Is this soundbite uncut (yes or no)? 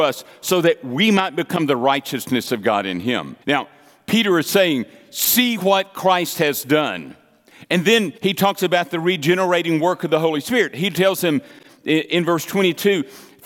no